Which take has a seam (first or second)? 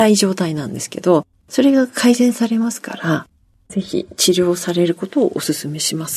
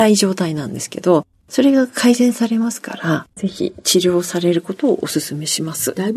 second